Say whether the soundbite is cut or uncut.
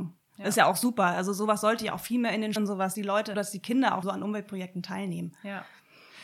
cut